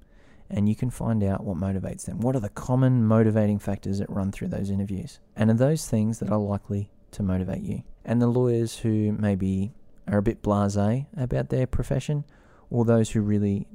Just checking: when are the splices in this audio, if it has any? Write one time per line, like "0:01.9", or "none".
0:05.3
0:08.0